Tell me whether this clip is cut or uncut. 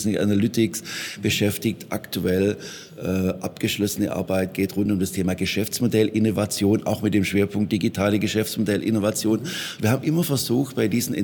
uncut